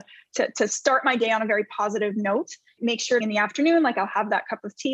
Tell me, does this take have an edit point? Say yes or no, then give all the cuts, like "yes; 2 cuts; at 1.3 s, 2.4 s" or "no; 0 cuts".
yes; 2 cuts; at 2.8 s, 3.2 s